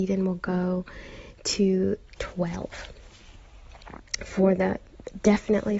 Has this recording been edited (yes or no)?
yes